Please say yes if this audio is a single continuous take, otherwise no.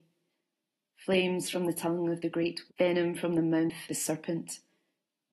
no